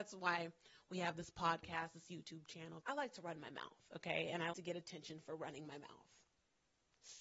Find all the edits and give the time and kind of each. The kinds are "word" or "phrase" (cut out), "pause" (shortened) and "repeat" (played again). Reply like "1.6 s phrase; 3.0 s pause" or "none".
2.8 s word; 4.5 s word